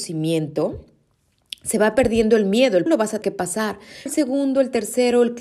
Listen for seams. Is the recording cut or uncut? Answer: cut